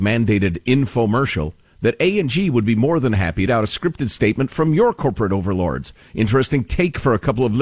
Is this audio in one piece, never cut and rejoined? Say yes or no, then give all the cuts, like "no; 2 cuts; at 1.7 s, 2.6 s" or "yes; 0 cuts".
no; 1 cut; at 3.5 s